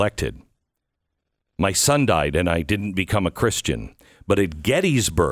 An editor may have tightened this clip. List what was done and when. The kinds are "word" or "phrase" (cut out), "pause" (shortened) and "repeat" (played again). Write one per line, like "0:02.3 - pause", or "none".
none